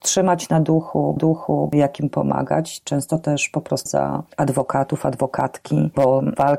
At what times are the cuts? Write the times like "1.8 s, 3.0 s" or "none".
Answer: 1.2 s, 3.9 s, 4.3 s